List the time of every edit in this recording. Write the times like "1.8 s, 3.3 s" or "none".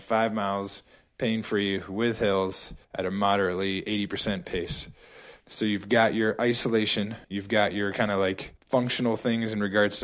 2.8 s, 5.4 s, 7.2 s, 8.6 s